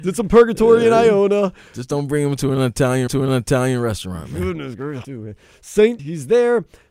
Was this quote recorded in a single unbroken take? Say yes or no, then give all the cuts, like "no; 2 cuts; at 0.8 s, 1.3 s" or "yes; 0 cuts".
no; 3 cuts; at 3.1 s, 5.0 s, 6.0 s